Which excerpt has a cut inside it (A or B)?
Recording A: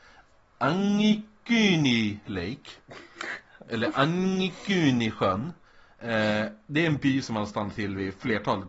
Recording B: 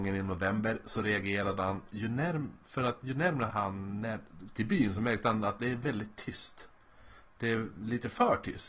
B